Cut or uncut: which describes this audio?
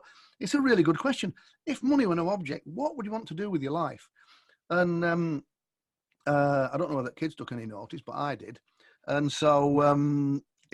uncut